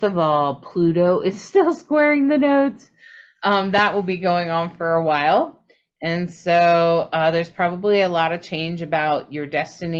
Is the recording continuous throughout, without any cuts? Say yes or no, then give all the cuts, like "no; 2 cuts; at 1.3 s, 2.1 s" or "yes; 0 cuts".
yes; 0 cuts